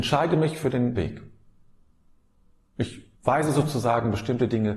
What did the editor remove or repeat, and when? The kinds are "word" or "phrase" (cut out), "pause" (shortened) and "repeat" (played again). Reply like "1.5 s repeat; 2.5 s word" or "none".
1.0 s word; 3.2 s pause